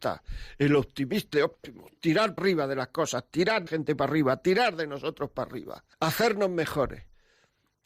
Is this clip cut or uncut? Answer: cut